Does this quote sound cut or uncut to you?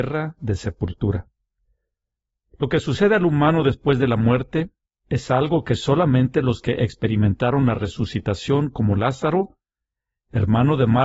uncut